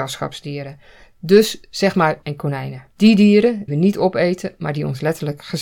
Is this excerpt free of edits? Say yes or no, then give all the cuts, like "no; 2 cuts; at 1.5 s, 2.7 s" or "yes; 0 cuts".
no; 3 cuts; at 2.2 s, 2.9 s, 3.7 s